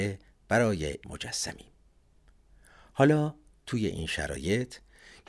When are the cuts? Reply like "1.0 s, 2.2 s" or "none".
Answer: 1.0 s